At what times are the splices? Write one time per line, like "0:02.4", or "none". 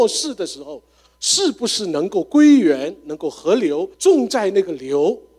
0:03.9